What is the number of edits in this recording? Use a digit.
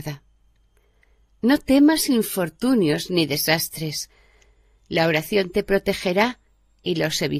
0